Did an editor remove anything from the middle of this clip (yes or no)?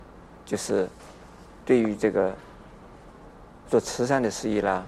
yes